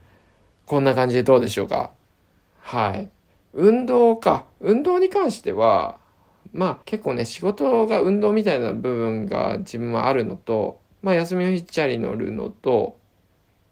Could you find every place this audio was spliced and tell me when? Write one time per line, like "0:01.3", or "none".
0:03.3
0:06.8